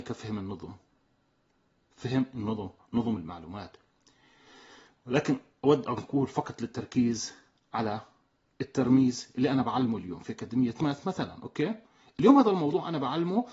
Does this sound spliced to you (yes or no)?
no